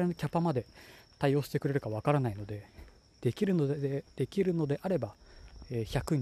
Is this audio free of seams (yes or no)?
yes